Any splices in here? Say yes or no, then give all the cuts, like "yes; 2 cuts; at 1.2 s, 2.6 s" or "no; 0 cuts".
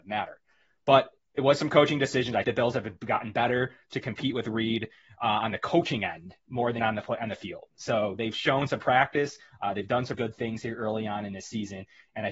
yes; 3 cuts; at 2.4 s, 6.8 s, 10.1 s